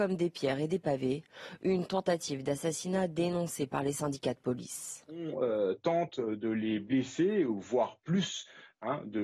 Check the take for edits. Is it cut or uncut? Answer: uncut